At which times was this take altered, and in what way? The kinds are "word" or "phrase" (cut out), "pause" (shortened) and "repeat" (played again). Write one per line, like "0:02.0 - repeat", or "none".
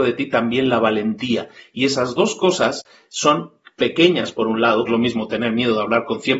0:04.9 - phrase